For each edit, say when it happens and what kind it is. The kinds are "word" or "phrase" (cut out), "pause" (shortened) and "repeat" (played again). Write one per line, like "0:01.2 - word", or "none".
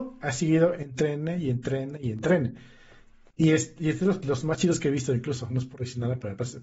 none